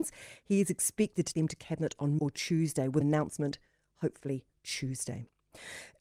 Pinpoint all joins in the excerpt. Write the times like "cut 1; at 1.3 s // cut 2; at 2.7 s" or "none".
cut 1; at 1.3 s // cut 2; at 2.2 s // cut 3; at 3.0 s